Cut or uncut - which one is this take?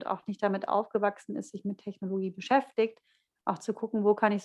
uncut